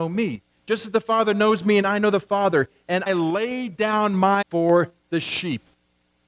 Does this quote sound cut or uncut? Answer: cut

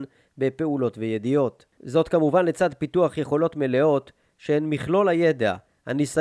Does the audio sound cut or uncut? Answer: uncut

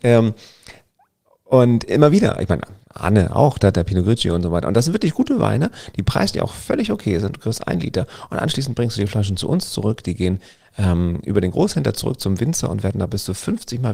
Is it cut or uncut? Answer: uncut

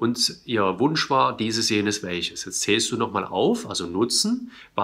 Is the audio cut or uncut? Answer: uncut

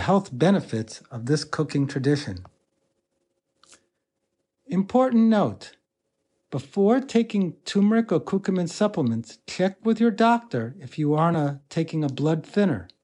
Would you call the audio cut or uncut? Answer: uncut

